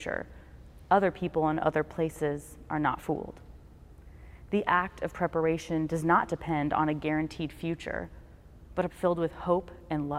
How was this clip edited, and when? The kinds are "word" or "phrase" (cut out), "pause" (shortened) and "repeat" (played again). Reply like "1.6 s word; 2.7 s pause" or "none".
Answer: 8.9 s word